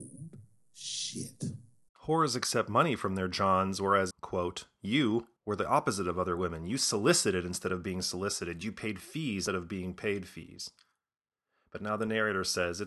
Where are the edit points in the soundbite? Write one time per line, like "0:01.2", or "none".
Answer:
0:01.9
0:04.1
0:05.4
0:09.5